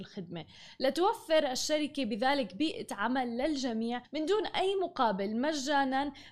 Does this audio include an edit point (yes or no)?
yes